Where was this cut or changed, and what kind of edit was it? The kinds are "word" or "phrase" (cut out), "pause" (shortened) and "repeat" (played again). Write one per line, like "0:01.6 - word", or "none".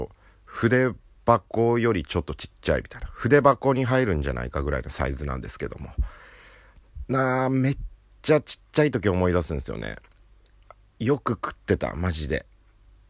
none